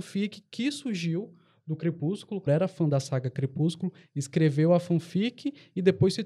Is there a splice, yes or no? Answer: yes